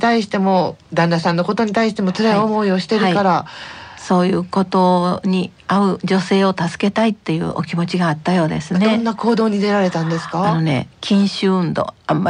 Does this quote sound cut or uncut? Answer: cut